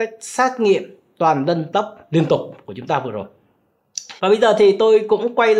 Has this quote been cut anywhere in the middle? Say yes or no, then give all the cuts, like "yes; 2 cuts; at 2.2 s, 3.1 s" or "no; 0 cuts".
yes; 2 cuts; at 1.7 s, 4.2 s